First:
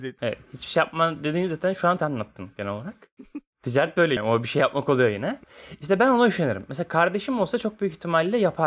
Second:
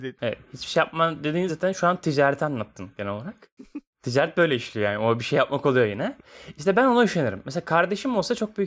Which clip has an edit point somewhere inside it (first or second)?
first